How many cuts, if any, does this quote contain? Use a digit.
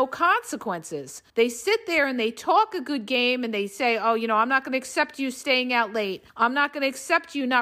2